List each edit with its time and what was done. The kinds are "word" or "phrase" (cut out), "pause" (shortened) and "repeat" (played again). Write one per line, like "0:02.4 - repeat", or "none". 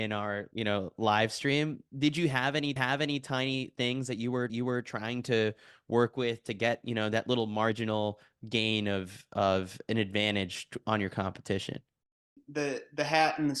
0:02.8 - repeat
0:04.5 - repeat